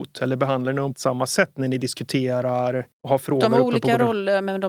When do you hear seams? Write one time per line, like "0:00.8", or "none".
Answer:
0:00.9
0:02.9